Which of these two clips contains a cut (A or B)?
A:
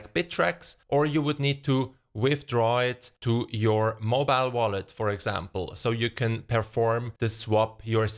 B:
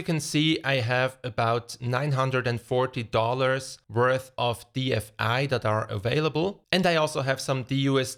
A